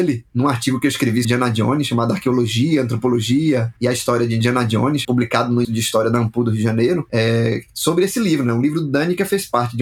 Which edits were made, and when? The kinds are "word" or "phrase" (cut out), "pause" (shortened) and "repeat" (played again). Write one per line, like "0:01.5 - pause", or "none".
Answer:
0:01.2 - word
0:05.6 - word